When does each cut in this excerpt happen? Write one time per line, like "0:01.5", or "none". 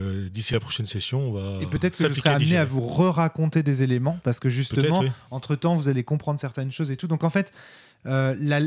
none

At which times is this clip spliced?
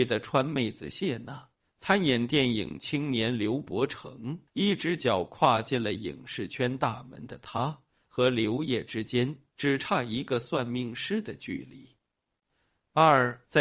0:04.5

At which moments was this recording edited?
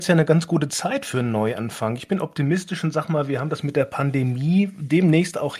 none

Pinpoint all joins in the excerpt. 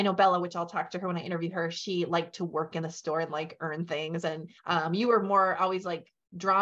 0:04.6

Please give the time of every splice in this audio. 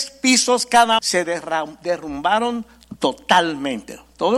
0:01.0

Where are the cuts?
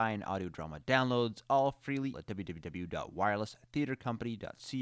0:02.1

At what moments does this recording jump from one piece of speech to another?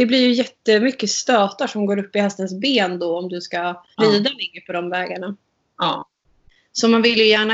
0:03.9

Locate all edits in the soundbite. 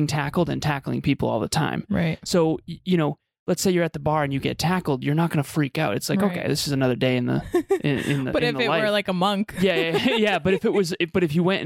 none

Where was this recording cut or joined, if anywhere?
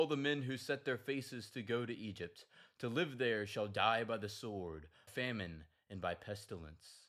0:05.1

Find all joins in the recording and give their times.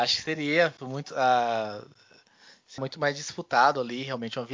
0:01.1
0:02.8

